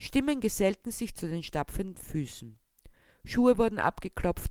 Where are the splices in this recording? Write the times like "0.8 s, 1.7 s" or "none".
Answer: none